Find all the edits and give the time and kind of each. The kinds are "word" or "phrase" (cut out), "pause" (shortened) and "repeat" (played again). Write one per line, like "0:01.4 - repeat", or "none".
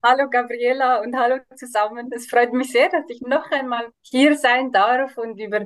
0:03.9 - pause